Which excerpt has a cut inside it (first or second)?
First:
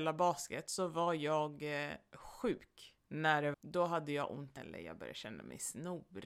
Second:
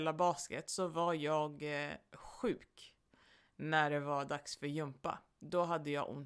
first